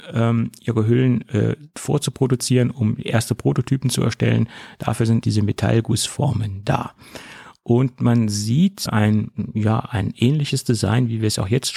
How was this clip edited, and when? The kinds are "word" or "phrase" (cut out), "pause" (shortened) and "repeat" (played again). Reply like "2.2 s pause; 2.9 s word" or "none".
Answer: 5.2 s word; 8.9 s word